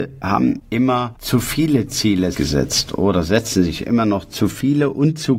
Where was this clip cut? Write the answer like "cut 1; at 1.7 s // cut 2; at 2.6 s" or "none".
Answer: cut 1; at 2.3 s